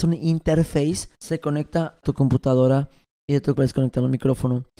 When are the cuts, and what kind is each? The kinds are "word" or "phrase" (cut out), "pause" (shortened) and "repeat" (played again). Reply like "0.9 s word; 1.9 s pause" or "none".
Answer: 1.1 s pause; 2.0 s word; 3.5 s word